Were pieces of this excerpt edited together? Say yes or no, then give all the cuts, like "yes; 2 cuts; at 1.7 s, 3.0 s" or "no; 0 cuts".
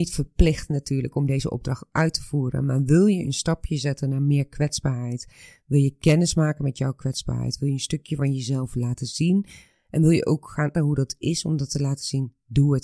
yes; 1 cut; at 10.7 s